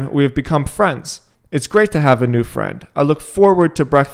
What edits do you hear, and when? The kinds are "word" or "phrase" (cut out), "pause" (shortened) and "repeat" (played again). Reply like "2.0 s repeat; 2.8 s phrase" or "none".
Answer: 1.4 s pause